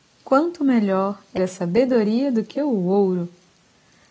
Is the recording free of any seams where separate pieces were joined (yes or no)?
no